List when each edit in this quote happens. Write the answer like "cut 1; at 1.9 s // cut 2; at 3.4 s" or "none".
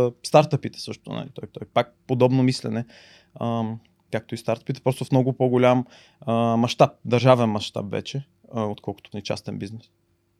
cut 1; at 1.5 s // cut 2; at 9.1 s